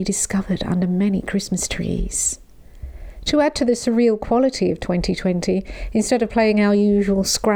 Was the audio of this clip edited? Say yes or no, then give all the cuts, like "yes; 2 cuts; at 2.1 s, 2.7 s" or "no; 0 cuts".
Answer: no; 0 cuts